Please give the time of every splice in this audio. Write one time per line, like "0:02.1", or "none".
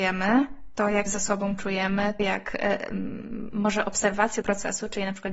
0:01.1
0:02.2
0:04.4